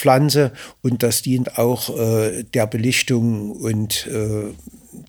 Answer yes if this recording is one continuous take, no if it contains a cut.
yes